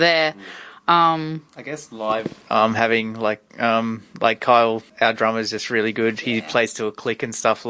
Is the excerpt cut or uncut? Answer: cut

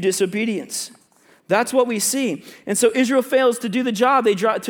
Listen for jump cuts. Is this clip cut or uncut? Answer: uncut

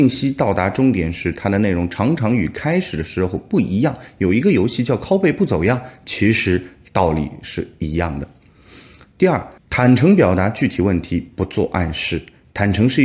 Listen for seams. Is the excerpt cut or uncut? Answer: cut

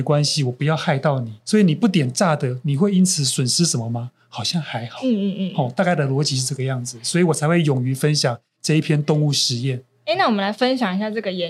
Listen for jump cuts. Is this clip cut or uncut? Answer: cut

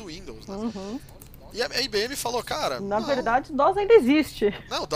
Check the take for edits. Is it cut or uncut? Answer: uncut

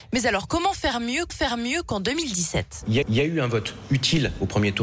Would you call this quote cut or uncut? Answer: cut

